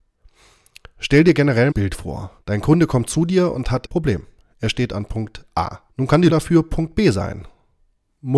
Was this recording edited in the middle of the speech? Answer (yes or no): yes